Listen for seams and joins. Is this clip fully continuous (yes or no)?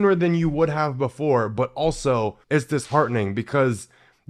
no